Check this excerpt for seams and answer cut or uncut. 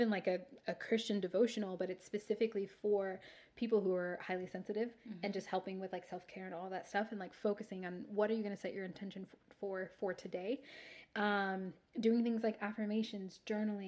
uncut